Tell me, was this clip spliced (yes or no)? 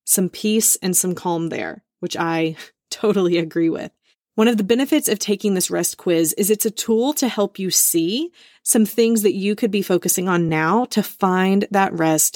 no